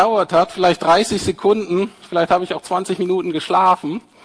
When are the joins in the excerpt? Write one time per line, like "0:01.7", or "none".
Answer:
none